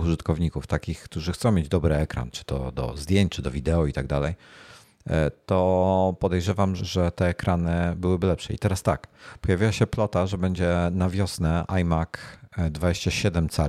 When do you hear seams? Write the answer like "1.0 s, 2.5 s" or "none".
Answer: 6.8 s